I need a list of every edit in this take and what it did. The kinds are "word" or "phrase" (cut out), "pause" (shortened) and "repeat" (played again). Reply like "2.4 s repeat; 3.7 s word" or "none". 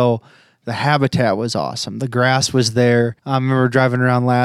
3.2 s pause